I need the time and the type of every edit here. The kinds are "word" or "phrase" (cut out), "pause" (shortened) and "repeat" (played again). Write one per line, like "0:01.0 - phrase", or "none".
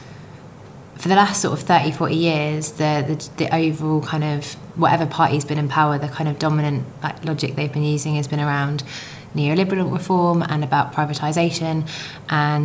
none